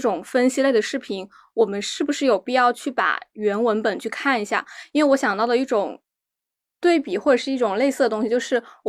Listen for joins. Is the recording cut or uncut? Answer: uncut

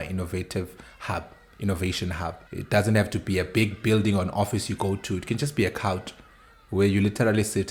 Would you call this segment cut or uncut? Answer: cut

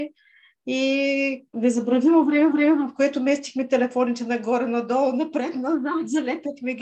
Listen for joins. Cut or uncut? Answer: cut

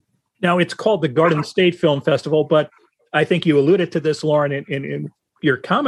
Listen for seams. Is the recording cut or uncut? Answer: uncut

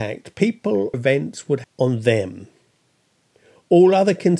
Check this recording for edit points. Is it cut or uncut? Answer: cut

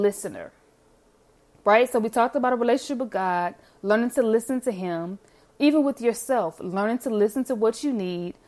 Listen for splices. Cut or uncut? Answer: uncut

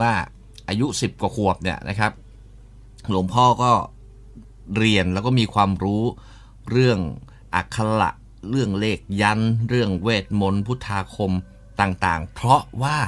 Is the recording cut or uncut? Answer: uncut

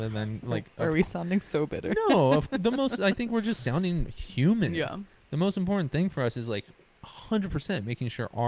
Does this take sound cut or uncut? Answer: uncut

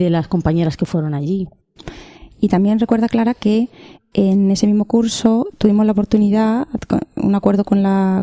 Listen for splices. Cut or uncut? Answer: uncut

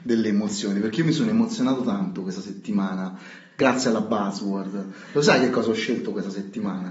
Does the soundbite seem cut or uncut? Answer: uncut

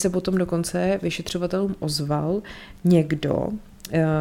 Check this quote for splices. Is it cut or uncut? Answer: uncut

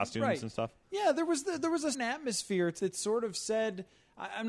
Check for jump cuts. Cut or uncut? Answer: cut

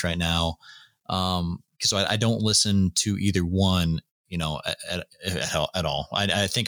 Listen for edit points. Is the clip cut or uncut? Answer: uncut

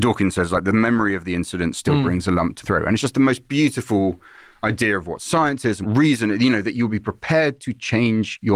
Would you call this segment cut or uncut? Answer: cut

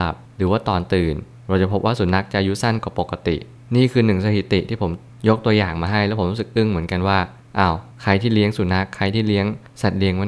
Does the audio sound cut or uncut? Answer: uncut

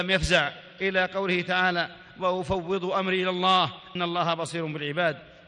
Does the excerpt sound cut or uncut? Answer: cut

